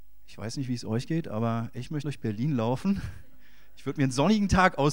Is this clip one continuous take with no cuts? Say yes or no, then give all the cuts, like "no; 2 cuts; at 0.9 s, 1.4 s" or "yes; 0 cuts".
no; 1 cut; at 2.0 s